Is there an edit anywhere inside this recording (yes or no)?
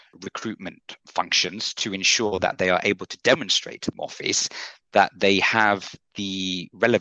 yes